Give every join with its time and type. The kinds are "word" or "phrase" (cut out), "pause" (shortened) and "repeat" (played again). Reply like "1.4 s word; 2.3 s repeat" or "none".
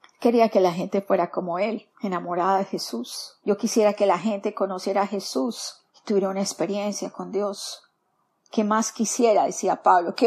1.9 s pause; 3.4 s pause; 5.9 s pause